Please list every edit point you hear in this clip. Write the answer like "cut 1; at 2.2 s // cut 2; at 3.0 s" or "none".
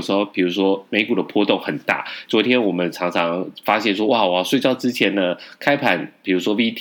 cut 1; at 2.3 s